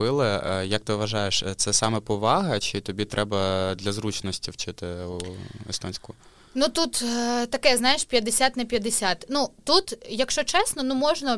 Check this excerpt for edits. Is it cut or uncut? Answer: uncut